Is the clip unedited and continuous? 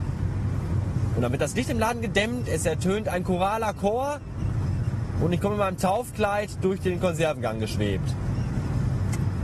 yes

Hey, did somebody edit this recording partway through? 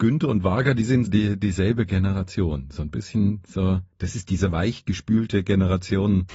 yes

